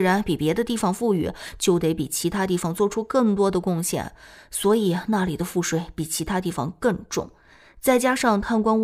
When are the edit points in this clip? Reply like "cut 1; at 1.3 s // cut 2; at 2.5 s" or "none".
none

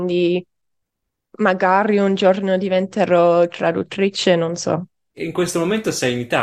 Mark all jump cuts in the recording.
none

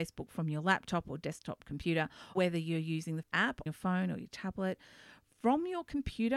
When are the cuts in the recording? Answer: cut 1; at 2.4 s // cut 2; at 3.2 s // cut 3; at 3.7 s

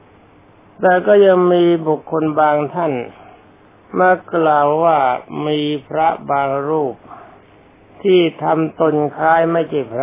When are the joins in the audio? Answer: cut 1; at 3.4 s // cut 2; at 7.4 s

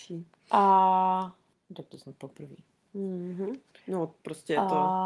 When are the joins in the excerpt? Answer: cut 1; at 1.5 s

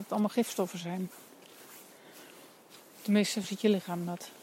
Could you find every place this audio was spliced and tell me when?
cut 1; at 3.4 s

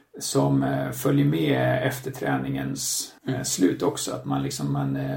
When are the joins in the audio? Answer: cut 1; at 3.2 s

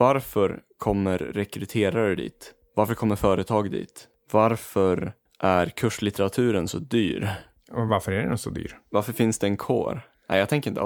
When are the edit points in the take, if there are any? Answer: none

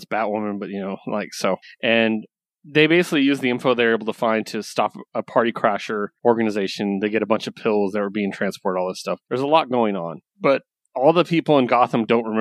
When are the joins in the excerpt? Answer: cut 1; at 1.6 s // cut 2; at 6.2 s // cut 3; at 9.2 s // cut 4; at 10.3 s

